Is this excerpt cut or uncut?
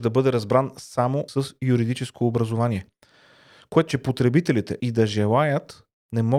cut